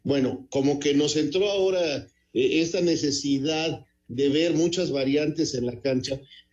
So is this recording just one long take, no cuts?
yes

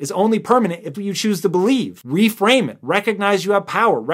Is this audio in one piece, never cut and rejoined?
no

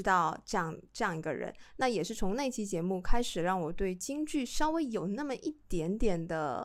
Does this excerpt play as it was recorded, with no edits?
yes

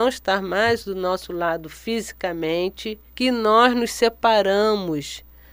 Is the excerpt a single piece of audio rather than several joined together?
no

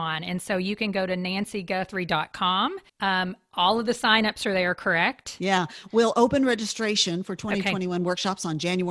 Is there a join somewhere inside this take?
yes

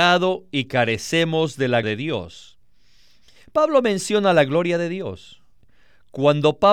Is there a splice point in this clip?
yes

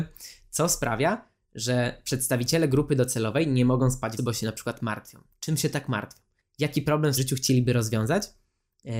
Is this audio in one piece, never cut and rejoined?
no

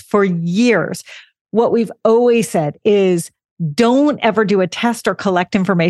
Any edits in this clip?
no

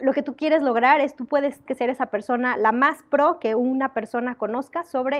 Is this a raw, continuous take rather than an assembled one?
no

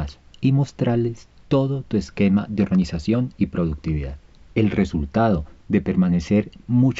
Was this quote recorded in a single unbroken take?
yes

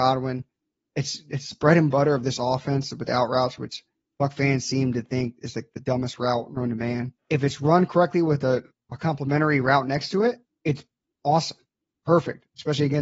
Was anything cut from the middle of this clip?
yes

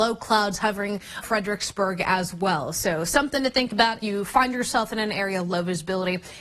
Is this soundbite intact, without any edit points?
no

